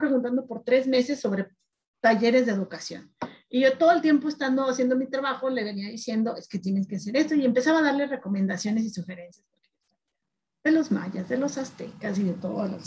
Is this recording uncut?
yes; 0 cuts

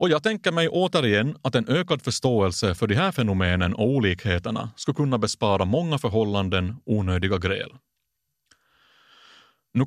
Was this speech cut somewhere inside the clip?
no; 0 cuts

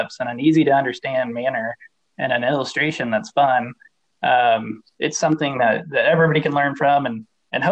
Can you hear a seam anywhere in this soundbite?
no; 0 cuts

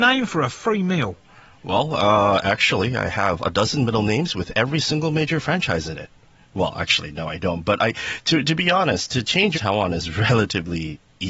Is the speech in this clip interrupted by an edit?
yes; 1 cut; at 9.5 s

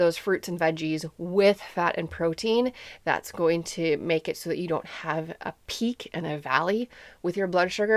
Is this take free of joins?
yes; 0 cuts

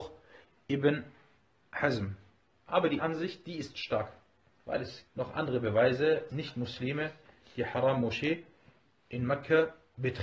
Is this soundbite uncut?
no; 3 cuts; at 3.0 s, 5.1 s, 6.3 s

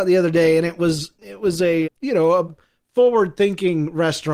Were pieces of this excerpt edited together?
yes; 3 cuts; at 1.1 s, 1.8 s, 2.5 s

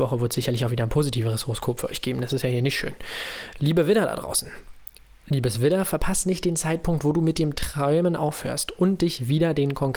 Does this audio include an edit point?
no; 0 cuts

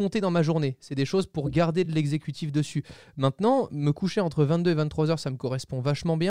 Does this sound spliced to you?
no; 0 cuts

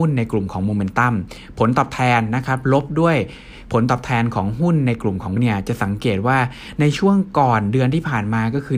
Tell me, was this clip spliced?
yes; 1 cut; at 5.4 s

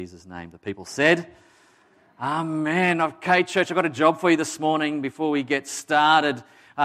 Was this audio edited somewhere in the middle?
no; 0 cuts

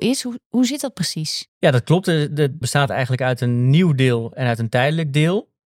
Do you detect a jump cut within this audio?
yes; 2 cuts; at 1.5 s, 2.6 s

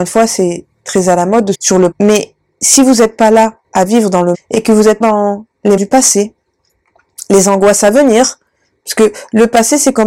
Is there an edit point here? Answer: yes; 6 cuts; at 1.5 s, 1.9 s, 3.6 s, 4.3 s, 5.0 s, 5.8 s

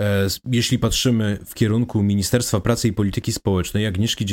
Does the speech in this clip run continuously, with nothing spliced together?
yes; 0 cuts

